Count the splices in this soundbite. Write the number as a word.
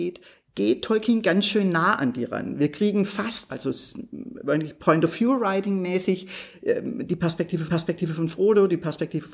two